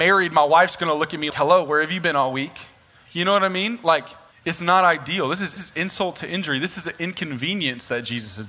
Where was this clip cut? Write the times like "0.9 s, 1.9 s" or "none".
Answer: 1.3 s, 4.3 s, 5.6 s